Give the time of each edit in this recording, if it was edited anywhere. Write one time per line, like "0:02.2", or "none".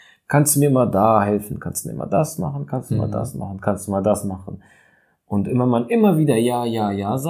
none